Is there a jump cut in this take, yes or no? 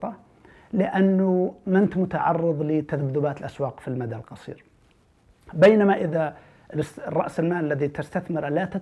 no